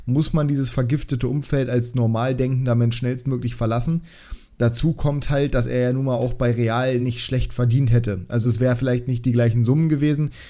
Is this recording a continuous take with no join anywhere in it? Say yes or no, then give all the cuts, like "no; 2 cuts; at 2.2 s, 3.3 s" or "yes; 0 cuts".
yes; 0 cuts